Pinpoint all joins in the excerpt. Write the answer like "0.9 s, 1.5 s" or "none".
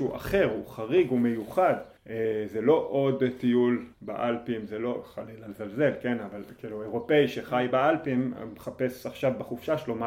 2.0 s, 3.9 s